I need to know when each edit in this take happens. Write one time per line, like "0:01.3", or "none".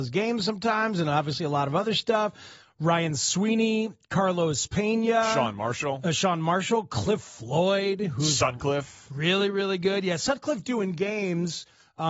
none